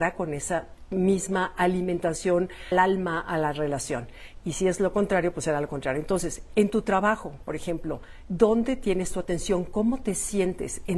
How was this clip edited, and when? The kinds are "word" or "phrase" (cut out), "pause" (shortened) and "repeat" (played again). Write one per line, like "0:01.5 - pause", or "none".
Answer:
0:02.7 - word